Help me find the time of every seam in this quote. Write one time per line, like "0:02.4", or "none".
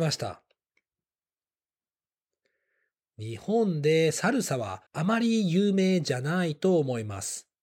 0:04.9